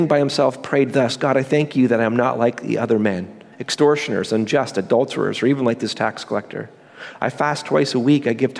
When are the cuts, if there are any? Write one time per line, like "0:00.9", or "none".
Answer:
0:03.5